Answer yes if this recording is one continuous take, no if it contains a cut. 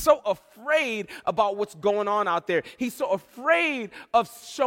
yes